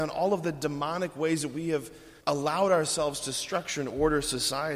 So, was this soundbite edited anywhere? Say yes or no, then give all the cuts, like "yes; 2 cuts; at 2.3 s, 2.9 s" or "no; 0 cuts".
yes; 1 cut; at 2.2 s